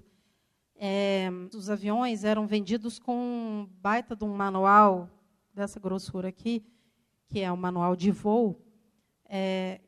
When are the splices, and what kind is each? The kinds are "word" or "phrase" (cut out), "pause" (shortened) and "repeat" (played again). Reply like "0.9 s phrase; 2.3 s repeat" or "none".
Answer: 1.5 s phrase